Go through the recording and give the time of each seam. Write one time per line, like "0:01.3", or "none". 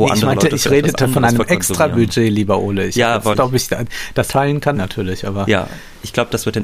0:03.3
0:04.3
0:04.7